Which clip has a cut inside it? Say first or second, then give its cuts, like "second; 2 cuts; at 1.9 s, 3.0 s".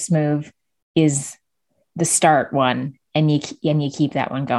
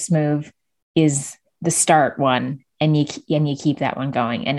second; 1 cut; at 1.4 s